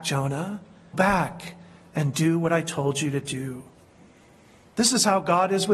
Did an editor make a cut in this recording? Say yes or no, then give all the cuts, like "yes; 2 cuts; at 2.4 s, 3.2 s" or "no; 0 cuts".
yes; 1 cut; at 0.9 s